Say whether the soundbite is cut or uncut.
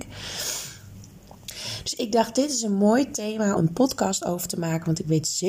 cut